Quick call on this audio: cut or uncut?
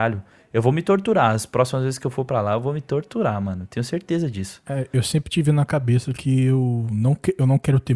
uncut